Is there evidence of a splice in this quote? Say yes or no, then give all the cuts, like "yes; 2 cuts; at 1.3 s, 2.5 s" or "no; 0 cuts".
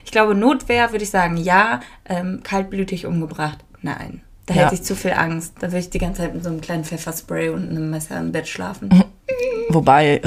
no; 0 cuts